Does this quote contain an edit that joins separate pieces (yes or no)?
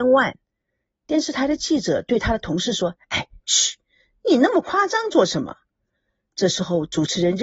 no